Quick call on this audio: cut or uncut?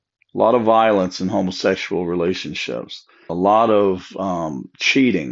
cut